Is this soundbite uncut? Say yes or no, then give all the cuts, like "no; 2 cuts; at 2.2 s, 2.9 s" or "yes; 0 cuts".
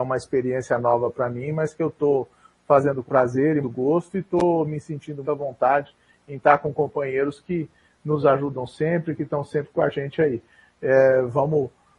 no; 3 cuts; at 3.1 s, 3.6 s, 5.2 s